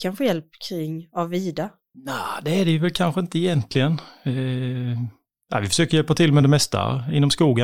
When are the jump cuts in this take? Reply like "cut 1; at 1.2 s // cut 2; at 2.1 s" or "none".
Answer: none

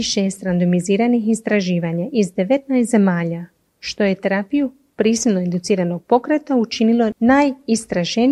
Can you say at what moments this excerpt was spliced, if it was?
none

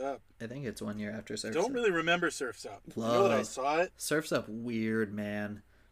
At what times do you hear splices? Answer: none

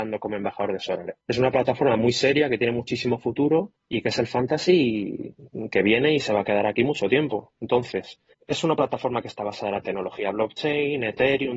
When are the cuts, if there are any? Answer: cut 1; at 1.2 s // cut 2; at 3.8 s // cut 3; at 8.3 s

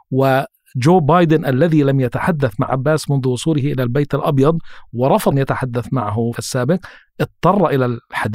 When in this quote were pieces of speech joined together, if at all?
cut 1; at 2.7 s // cut 2; at 5.3 s // cut 3; at 6.4 s

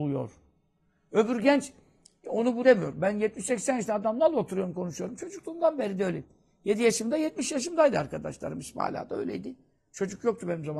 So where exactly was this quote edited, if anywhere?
cut 1; at 2.6 s

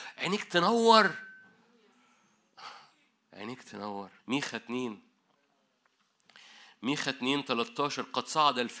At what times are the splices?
cut 1; at 4.2 s

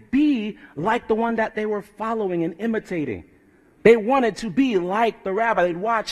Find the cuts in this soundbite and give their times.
none

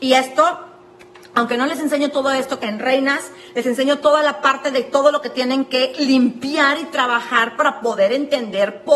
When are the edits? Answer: cut 1; at 2.6 s

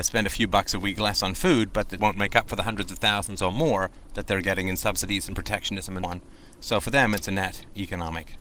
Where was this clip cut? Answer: cut 1; at 2.0 s // cut 2; at 6.0 s

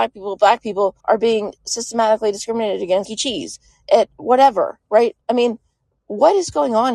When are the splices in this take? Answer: cut 1; at 1.0 s // cut 2; at 3.1 s // cut 3; at 3.8 s // cut 4; at 5.2 s

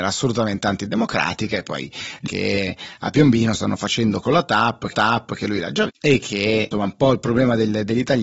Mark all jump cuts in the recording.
cut 1; at 2.3 s // cut 2; at 4.2 s // cut 3; at 4.9 s // cut 4; at 5.9 s // cut 5; at 6.7 s

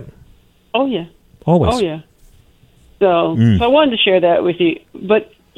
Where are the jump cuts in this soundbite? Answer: none

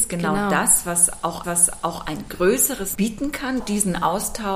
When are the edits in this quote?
cut 1; at 1.4 s // cut 2; at 2.9 s // cut 3; at 3.6 s

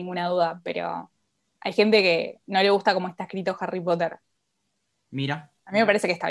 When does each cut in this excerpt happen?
none

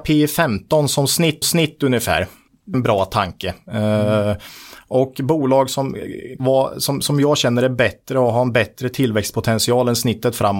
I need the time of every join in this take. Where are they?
cut 1; at 1.4 s // cut 2; at 2.7 s // cut 3; at 6.4 s // cut 4; at 7.0 s

